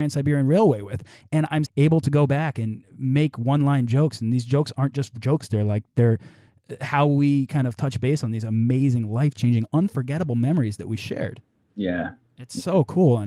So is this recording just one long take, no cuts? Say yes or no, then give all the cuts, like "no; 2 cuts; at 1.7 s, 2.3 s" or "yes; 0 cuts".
no; 1 cut; at 1.7 s